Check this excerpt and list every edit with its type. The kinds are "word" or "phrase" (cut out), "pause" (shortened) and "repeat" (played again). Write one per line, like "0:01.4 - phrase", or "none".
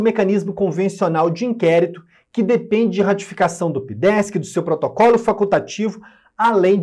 none